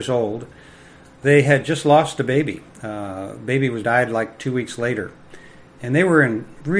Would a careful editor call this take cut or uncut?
cut